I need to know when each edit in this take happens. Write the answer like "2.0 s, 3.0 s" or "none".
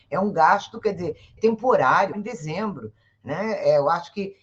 1.4 s, 2.1 s